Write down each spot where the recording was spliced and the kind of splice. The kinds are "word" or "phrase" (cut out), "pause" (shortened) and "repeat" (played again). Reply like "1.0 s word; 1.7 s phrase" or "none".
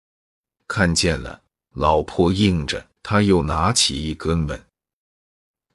3.0 s pause